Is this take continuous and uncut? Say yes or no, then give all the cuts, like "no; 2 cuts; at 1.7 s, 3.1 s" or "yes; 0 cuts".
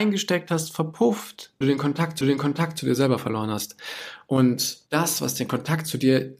no; 3 cuts; at 1.6 s, 2.2 s, 4.9 s